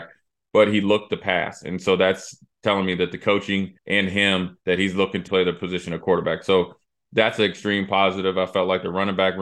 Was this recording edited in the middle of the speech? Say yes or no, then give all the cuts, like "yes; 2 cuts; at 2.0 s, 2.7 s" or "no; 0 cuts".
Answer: yes; 3 cuts; at 3.8 s, 4.6 s, 5.3 s